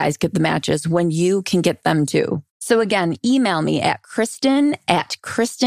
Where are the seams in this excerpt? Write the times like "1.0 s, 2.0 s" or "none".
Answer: none